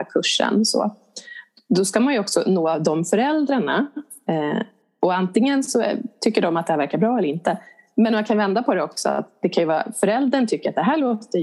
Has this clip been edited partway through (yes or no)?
no